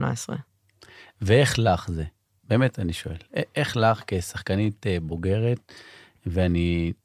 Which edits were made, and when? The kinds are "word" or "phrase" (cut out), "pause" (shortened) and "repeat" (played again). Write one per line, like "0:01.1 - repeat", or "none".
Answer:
none